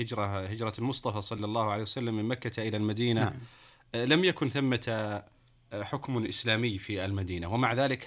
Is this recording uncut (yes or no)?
yes